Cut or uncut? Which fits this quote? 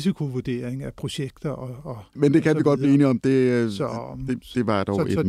cut